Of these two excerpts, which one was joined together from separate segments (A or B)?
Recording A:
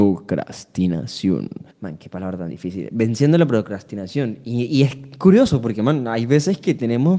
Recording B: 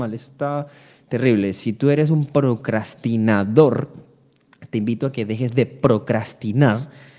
A